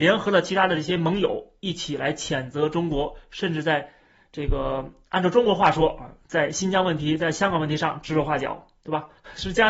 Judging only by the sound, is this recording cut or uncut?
uncut